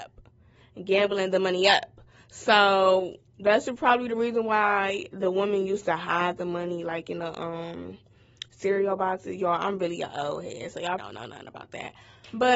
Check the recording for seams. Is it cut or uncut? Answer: cut